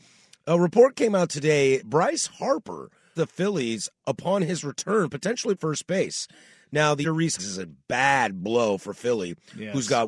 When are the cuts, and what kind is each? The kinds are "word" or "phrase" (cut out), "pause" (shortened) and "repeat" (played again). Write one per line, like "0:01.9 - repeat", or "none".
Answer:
0:01.8 - word
0:03.2 - word
0:03.9 - word
0:05.6 - word
0:07.0 - word
0:07.4 - word